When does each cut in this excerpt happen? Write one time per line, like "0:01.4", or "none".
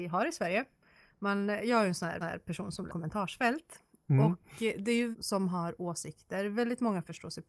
0:02.2
0:02.9
0:05.1